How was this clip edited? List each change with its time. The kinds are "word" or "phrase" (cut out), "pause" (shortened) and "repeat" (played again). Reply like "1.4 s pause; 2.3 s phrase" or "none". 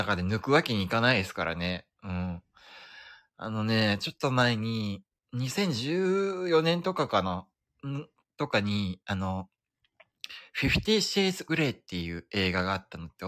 11.5 s word